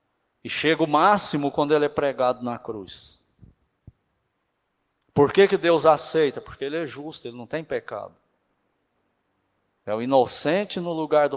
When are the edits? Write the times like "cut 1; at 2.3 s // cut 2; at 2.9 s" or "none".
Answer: none